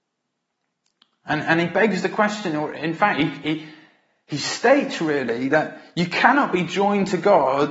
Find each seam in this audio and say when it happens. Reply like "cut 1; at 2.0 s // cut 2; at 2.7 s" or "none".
none